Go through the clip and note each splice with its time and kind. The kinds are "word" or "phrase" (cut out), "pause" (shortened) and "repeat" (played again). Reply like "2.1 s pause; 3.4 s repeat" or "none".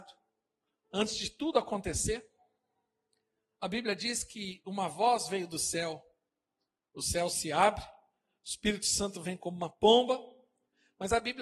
none